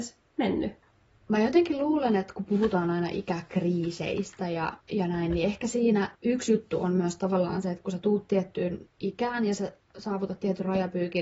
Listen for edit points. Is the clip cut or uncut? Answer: cut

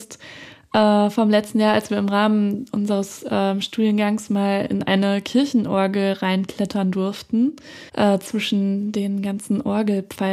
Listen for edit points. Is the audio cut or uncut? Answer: cut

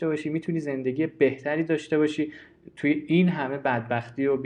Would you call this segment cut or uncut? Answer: uncut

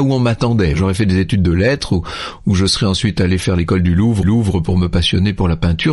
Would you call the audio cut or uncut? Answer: cut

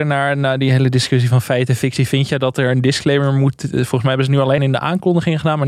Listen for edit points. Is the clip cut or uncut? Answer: cut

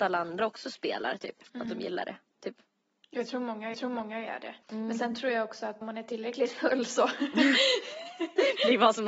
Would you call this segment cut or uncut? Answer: cut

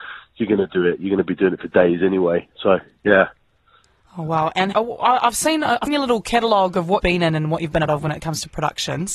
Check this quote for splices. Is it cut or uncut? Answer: cut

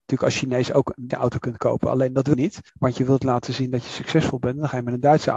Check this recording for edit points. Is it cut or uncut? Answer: cut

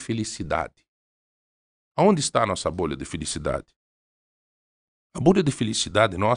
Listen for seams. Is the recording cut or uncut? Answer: uncut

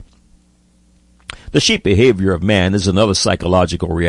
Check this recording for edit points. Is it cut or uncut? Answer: cut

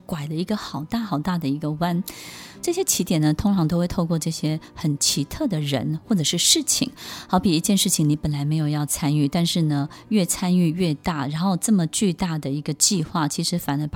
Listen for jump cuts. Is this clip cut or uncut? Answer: uncut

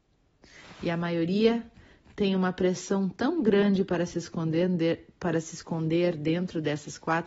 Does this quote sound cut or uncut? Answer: uncut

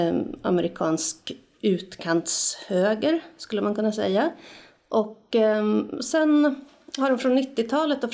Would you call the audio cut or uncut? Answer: uncut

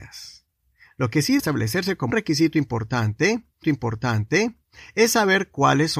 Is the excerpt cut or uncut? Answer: cut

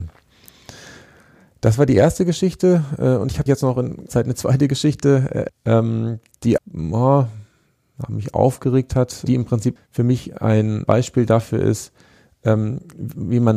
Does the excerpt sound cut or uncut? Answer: cut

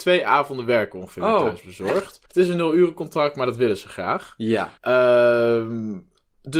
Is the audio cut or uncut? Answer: cut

